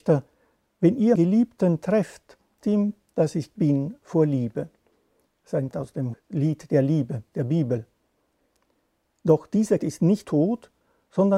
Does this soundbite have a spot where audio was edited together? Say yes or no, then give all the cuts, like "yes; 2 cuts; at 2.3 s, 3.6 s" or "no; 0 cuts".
yes; 8 cuts; at 1.1 s, 2.6 s, 3.5 s, 5.7 s, 6.1 s, 7.3 s, 9.8 s, 10.2 s